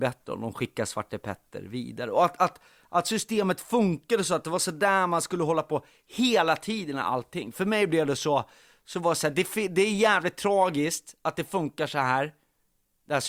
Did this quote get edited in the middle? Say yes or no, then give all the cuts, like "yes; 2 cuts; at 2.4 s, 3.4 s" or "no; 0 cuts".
no; 0 cuts